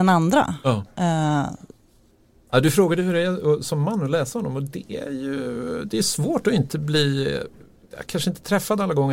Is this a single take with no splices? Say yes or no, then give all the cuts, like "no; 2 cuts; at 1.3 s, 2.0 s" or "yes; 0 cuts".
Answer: yes; 0 cuts